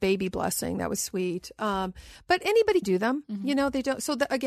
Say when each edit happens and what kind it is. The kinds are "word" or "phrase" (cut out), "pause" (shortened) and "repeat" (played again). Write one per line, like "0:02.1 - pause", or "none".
0:01.0 - word
0:02.8 - word